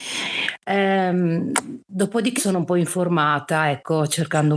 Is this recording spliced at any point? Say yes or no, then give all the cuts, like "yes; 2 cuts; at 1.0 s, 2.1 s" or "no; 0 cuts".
yes; 1 cut; at 2.4 s